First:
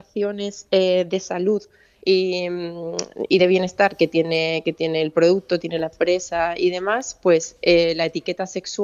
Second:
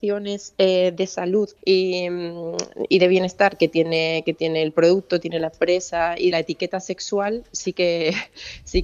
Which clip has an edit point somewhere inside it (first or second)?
second